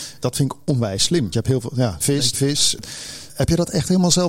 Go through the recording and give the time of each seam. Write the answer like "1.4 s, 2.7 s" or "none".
1.3 s, 2.0 s, 2.3 s